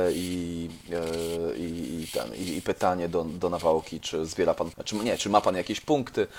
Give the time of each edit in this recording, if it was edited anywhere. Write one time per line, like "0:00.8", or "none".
0:04.7